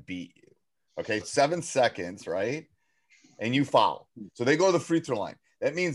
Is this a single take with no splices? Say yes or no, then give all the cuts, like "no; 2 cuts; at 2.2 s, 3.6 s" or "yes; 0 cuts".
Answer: no; 1 cut; at 1.2 s